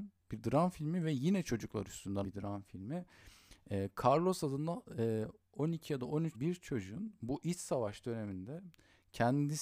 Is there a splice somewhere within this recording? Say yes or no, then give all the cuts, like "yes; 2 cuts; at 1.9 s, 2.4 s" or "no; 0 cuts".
yes; 2 cuts; at 2.2 s, 6.3 s